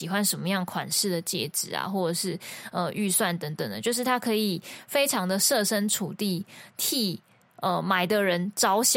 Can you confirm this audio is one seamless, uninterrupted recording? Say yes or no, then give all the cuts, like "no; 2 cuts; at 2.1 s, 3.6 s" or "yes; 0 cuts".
yes; 0 cuts